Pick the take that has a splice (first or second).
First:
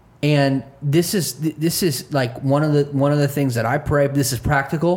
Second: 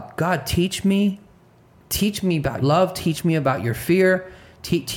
second